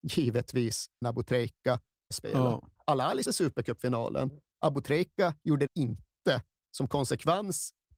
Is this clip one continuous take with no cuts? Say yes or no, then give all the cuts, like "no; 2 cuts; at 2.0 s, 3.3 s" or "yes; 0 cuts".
no; 4 cuts; at 1.0 s, 2.1 s, 3.3 s, 5.7 s